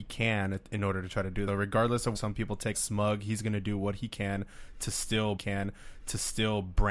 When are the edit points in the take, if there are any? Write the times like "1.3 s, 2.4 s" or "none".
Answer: 1.5 s, 2.2 s, 2.7 s, 5.4 s